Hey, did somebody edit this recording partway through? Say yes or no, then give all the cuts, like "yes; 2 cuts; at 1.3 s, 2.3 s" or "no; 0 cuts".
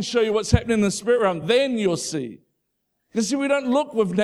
no; 0 cuts